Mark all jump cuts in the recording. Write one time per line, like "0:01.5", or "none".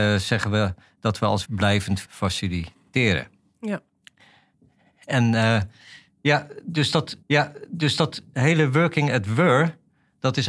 0:01.4
0:02.0
0:07.2